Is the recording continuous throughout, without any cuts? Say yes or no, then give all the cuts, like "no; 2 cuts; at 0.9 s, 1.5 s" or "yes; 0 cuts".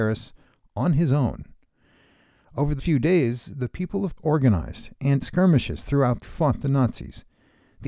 no; 4 cuts; at 2.8 s, 4.2 s, 5.2 s, 6.2 s